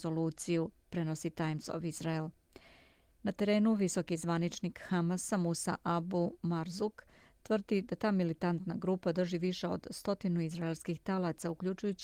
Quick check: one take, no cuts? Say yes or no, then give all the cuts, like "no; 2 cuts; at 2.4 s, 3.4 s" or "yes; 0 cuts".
yes; 0 cuts